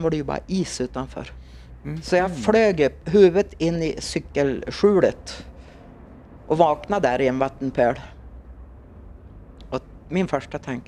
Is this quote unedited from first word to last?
yes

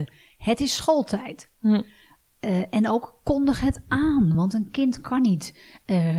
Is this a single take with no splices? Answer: yes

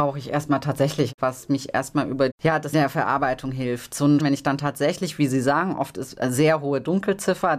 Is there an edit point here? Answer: yes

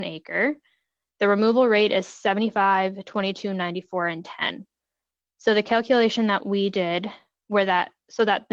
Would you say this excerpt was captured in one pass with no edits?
yes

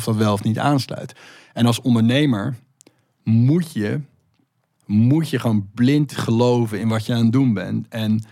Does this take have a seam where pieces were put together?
no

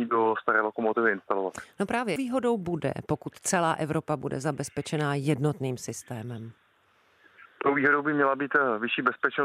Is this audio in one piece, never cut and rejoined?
no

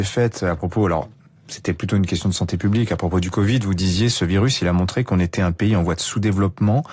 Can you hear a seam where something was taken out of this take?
no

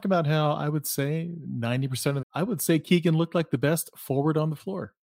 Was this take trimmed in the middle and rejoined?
yes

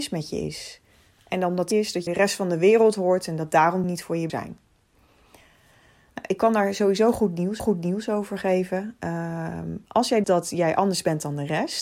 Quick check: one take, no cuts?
no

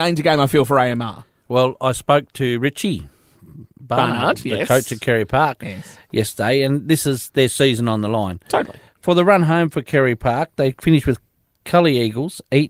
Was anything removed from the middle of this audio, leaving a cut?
no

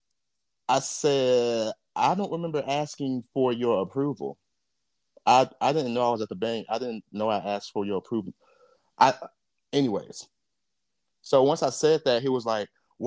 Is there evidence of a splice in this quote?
no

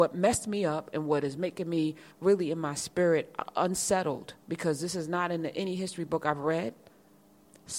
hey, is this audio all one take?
no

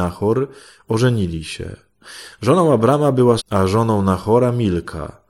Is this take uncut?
no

